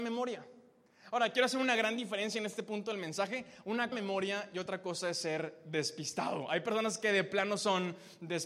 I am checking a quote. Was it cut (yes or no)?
yes